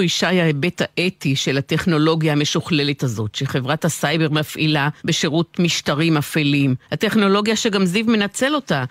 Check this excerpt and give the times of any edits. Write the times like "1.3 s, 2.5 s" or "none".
5.0 s, 6.8 s